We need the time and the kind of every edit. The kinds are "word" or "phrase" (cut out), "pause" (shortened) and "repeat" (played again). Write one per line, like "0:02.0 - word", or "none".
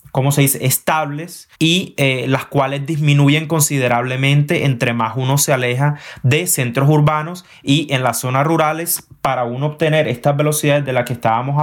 0:01.5 - pause

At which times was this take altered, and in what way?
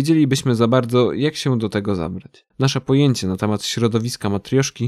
0:02.5 - pause

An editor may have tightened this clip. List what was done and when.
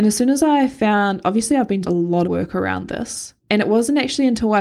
0:01.8 - word
0:02.2 - word
0:03.4 - pause

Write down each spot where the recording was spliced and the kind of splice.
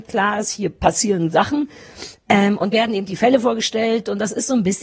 0:01.3 - word
0:02.7 - word

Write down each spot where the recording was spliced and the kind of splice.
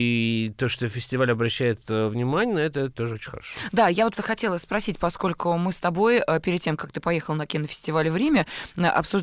0:04.1 - word

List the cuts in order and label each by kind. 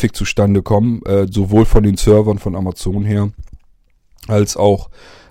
none

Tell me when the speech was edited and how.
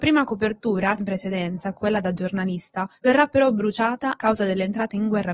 0:01.0 - word
0:01.7 - word
0:03.0 - pause
0:04.2 - word

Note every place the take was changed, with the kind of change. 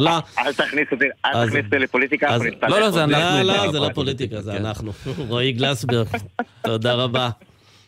none

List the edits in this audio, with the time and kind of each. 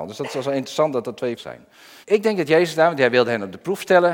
0:01.4 - word
0:02.0 - pause

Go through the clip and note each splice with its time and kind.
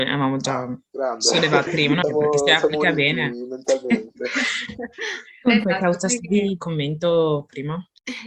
0:01.7 - phrase
0:02.0 - word
0:06.6 - phrase

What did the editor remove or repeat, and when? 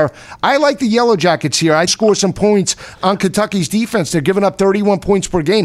0:01.9 - phrase

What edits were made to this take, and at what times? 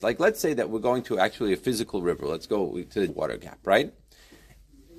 0:03.1 - word

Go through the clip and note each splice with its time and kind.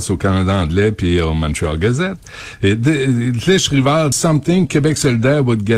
0:04.1 - phrase

